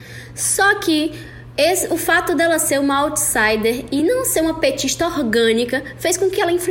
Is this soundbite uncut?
yes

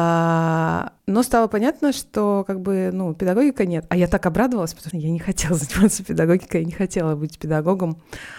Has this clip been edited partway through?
yes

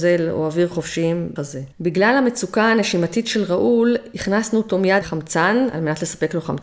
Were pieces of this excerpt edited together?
yes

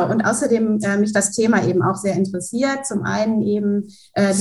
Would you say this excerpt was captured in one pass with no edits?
yes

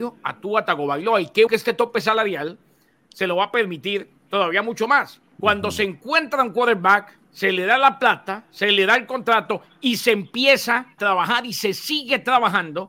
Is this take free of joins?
no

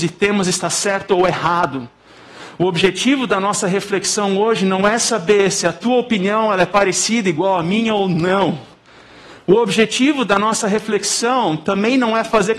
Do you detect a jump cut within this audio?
no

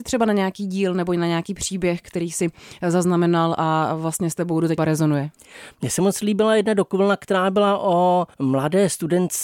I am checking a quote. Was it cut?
yes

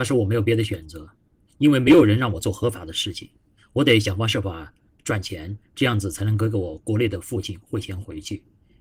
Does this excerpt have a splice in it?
no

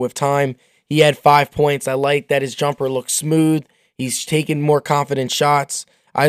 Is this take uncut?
yes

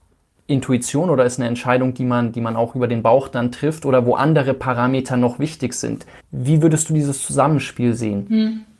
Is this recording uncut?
no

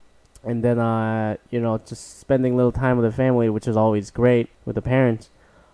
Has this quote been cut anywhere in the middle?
yes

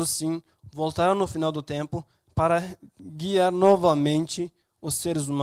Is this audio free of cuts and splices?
yes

